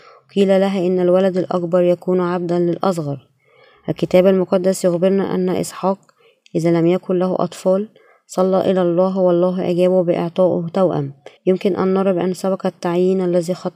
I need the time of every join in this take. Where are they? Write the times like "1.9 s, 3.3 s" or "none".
11.4 s